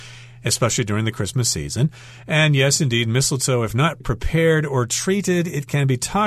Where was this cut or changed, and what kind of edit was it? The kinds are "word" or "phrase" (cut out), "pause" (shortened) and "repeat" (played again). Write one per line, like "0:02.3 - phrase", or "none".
0:04.0 - word

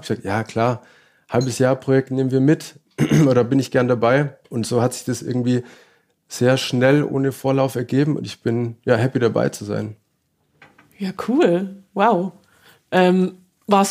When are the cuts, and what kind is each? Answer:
0:04.4 - pause

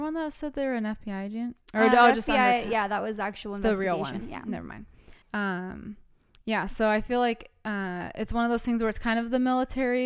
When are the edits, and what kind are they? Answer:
0:05.2 - pause

